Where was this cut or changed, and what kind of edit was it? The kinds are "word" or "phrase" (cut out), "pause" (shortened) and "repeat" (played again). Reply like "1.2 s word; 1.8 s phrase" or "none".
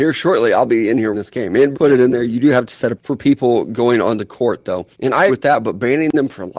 1.1 s word; 1.7 s word; 3.0 s word; 4.9 s pause; 5.3 s word